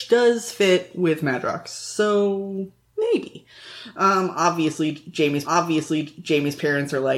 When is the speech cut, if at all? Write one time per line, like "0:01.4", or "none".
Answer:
0:05.4